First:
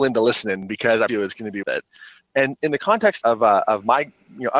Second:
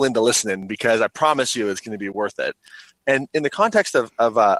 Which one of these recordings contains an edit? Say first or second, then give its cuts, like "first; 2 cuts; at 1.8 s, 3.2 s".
first; 3 cuts; at 1.1 s, 1.6 s, 3.2 s